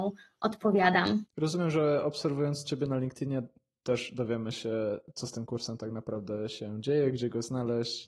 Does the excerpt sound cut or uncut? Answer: uncut